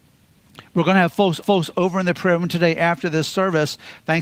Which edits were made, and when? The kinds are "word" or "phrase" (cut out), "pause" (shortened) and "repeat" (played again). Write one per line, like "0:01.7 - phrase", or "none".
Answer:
0:01.4 - repeat